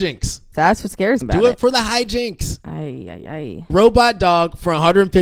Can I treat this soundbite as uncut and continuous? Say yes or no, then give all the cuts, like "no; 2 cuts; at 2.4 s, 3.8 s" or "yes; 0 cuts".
no; 2 cuts; at 1.2 s, 3.7 s